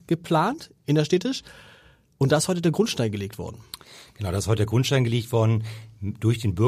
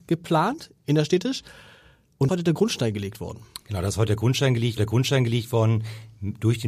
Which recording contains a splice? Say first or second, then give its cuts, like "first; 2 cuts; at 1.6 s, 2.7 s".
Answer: second; 3 cuts; at 2.3 s, 3.6 s, 4.8 s